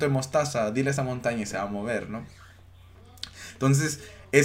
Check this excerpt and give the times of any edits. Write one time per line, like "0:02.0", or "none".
none